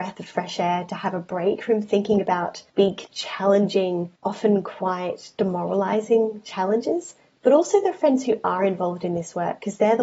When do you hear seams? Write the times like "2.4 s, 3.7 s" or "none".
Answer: 2.7 s, 4.2 s, 7.3 s